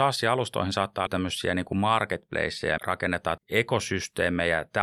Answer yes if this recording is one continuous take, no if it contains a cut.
no